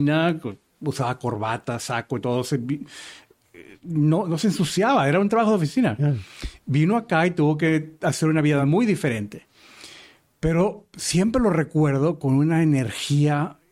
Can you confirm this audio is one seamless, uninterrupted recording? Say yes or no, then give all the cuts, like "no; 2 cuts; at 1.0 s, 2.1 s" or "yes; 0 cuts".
yes; 0 cuts